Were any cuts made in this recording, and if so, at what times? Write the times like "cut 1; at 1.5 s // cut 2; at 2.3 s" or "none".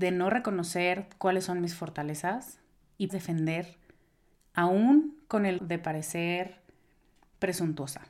cut 1; at 3.1 s // cut 2; at 5.6 s